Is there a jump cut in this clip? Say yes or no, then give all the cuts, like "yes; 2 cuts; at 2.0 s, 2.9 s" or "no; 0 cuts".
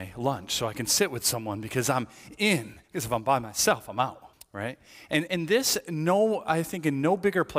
yes; 3 cuts; at 2.8 s, 4.3 s, 5.3 s